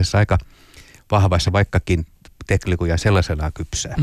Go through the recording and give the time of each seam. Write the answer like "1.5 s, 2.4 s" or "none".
1.5 s